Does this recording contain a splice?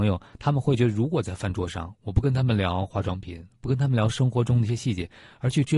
no; 0 cuts

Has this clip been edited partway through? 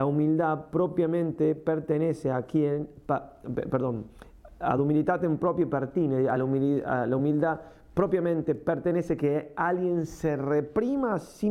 no; 0 cuts

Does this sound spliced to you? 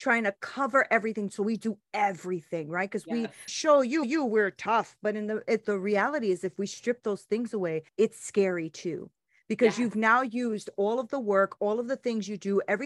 yes; 4 cuts; at 3.5 s, 4.0 s, 5.6 s, 7.9 s

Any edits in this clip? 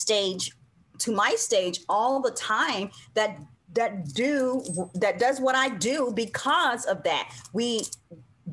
no; 0 cuts

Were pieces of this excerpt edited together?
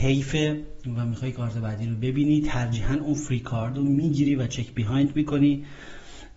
no; 0 cuts

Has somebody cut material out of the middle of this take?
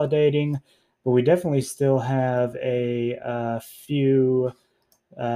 no; 0 cuts

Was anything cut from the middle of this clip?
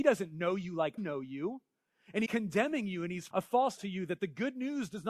yes; 4 cuts; at 1.0 s, 2.3 s, 3.3 s, 3.8 s

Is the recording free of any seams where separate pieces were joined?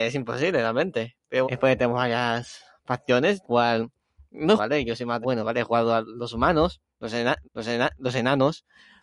no; 5 cuts; at 1.4 s, 3.4 s, 4.6 s, 5.2 s, 7.4 s

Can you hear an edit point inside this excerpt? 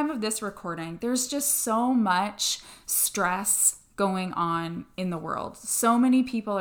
no; 0 cuts

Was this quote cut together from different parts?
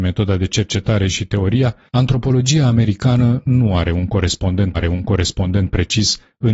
yes; 2 cuts; at 1.9 s, 4.7 s

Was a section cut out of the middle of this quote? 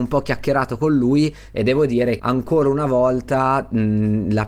yes; 1 cut; at 2.2 s

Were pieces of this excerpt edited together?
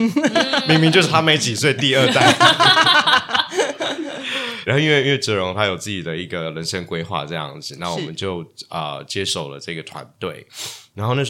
yes; 1 cut; at 4.7 s

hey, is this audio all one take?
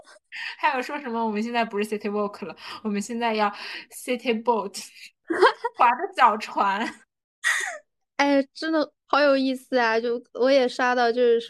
no; 1 cut; at 9.0 s

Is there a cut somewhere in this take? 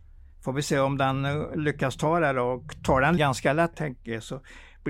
yes; 2 cuts; at 3.2 s, 3.7 s

